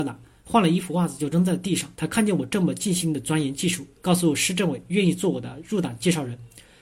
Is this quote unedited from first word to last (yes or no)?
no